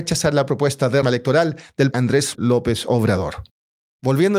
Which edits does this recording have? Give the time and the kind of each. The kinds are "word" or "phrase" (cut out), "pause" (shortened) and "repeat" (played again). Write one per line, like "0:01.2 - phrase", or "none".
0:01.0 - word
0:01.9 - word
0:02.3 - word